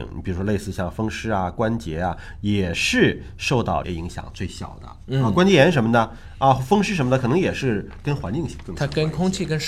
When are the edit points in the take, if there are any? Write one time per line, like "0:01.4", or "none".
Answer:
0:03.8

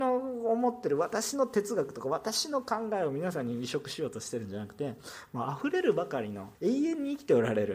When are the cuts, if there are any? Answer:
0:06.5

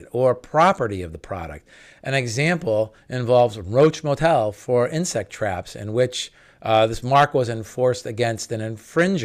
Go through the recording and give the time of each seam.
none

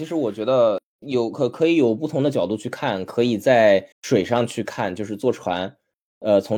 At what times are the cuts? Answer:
0:03.9

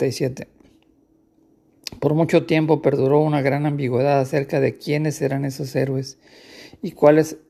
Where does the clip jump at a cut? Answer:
none

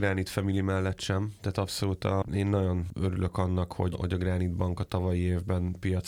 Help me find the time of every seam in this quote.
0:03.9

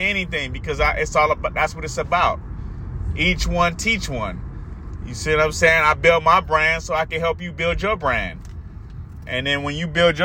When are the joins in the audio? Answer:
none

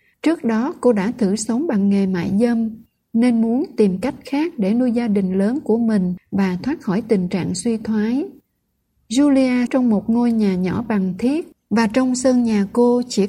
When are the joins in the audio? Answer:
0:09.7

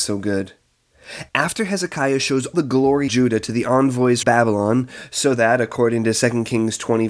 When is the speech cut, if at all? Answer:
0:02.5
0:03.1
0:04.2

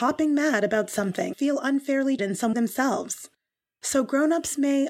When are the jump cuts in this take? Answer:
0:01.3
0:02.2
0:02.5

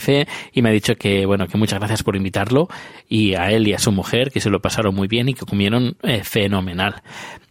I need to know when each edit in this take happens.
none

